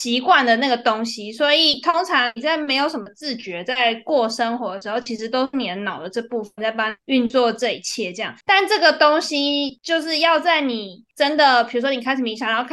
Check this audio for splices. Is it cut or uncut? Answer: cut